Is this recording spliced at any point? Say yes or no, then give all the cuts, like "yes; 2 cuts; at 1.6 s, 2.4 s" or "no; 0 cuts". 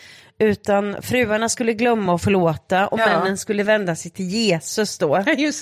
no; 0 cuts